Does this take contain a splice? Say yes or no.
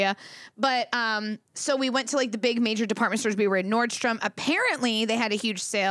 no